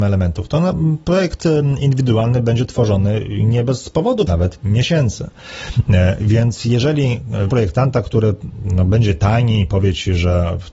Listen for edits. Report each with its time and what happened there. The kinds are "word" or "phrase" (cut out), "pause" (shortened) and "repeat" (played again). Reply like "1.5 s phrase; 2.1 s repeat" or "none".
4.3 s phrase; 7.5 s word